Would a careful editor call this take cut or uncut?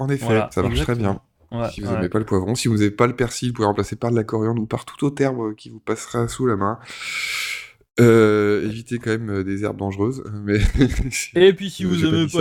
uncut